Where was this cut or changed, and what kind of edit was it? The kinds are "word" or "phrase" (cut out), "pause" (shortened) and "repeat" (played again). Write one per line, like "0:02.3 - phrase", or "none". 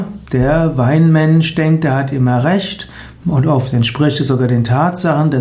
none